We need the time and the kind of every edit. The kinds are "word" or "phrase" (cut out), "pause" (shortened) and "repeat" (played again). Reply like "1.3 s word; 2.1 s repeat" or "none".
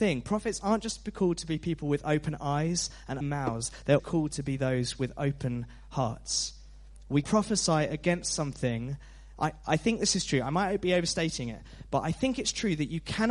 3.2 s word; 4.0 s word; 7.2 s word